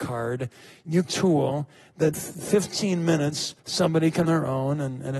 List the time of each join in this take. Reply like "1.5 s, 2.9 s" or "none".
1.0 s, 2.1 s, 3.6 s, 4.2 s